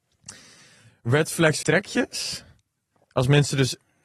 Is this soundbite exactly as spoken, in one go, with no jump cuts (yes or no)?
no